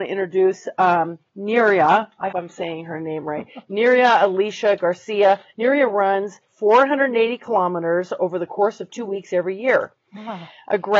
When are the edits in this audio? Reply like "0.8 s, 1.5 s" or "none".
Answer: 1.3 s, 2.3 s, 5.5 s, 6.4 s